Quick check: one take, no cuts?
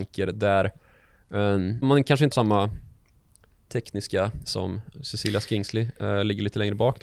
no; 3 cuts; at 1.8 s, 2.3 s, 4.4 s

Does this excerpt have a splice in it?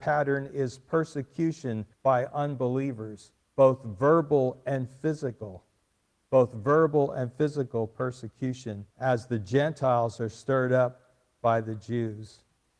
yes; 3 cuts; at 1.9 s, 3.4 s, 8.9 s

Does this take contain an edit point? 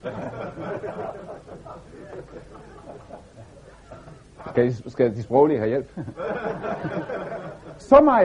no; 0 cuts

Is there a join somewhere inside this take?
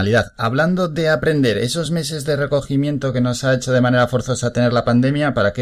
no; 0 cuts

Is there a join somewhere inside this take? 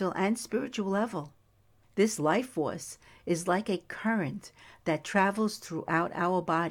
no; 0 cuts

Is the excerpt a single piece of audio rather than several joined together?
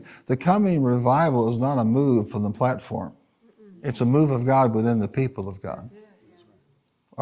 yes; 0 cuts

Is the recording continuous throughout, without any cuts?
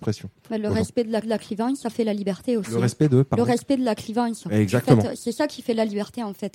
no; 1 cut; at 1.2 s

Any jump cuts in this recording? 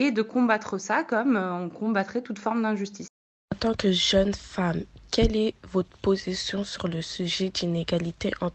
no; 0 cuts

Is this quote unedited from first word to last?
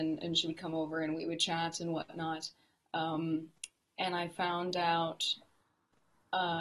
yes; 0 cuts

